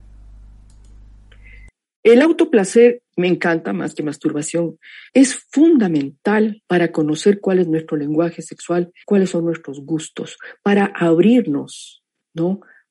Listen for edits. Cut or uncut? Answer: cut